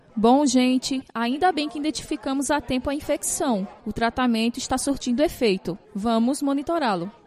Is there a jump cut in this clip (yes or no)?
yes